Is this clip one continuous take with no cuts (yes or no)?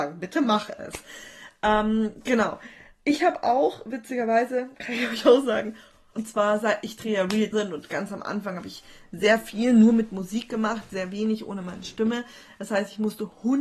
no